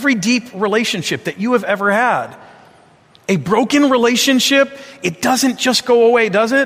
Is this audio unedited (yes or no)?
yes